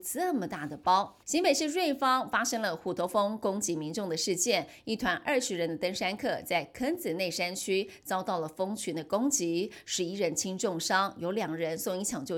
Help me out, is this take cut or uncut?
cut